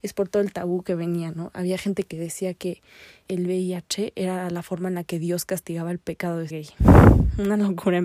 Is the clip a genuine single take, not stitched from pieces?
no; 2 cuts; at 3.3 s, 6.5 s

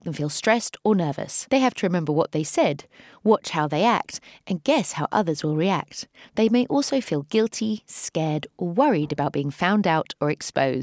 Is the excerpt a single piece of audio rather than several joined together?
yes; 0 cuts

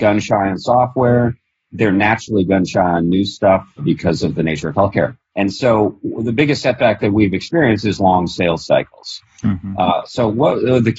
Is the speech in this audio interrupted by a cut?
no; 0 cuts

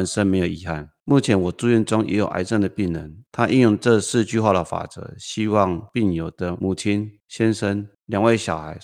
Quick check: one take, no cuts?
no; 1 cut; at 3.3 s

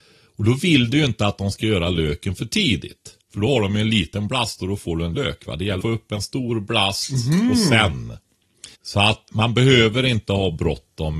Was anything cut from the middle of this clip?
yes; 5 cuts; at 3.2 s, 5.1 s, 5.8 s, 8.7 s, 9.3 s

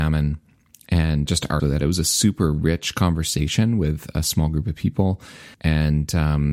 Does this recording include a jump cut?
yes; 3 cuts; at 1.3 s, 1.6 s, 5.5 s

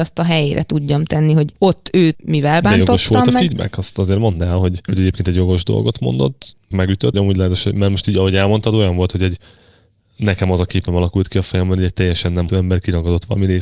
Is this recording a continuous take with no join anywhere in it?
no; 6 cuts; at 1.6 s, 2.1 s, 4.9 s, 6.7 s, 7.1 s, 12.5 s

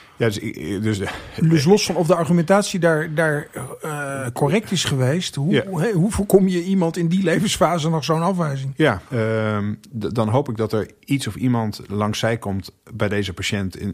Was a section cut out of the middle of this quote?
yes; 1 cut; at 9.1 s

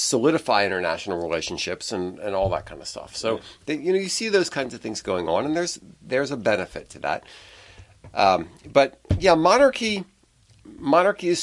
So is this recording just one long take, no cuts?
yes; 0 cuts

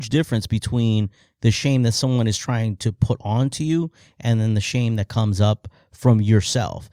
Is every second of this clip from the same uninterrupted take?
yes; 0 cuts

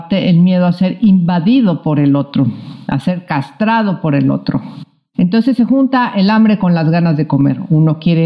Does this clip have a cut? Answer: no; 0 cuts

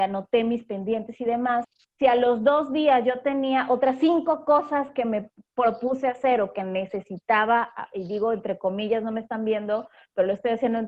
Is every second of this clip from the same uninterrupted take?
no; 1 cut; at 1.8 s

